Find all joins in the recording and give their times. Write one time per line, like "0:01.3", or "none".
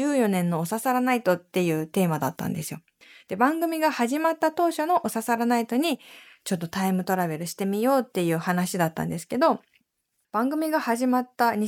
none